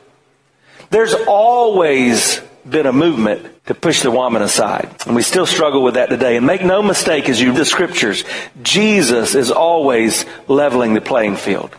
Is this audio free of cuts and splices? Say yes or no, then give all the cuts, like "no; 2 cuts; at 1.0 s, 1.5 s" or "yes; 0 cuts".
no; 3 cuts; at 3.6 s, 4.9 s, 7.5 s